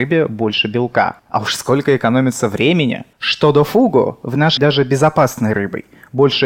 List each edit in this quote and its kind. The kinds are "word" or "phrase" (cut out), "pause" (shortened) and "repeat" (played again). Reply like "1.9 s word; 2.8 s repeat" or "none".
1.2 s pause; 3.1 s pause; 4.6 s phrase